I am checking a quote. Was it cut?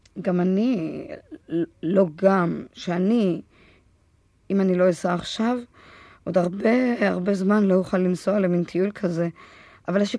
no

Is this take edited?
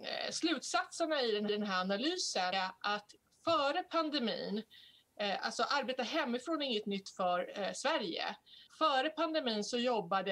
yes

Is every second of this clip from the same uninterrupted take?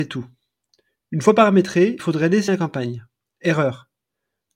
no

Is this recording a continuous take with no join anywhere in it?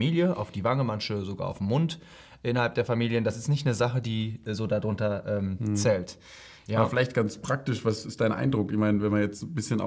yes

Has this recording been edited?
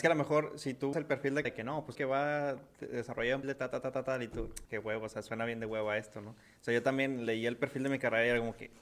yes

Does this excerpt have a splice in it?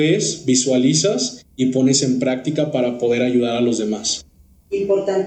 no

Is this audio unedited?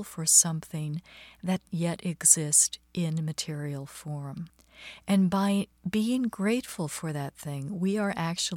no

